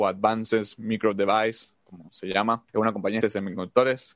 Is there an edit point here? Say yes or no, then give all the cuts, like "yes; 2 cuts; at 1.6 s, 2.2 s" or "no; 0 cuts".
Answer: yes; 3 cuts; at 1.7 s, 2.7 s, 3.2 s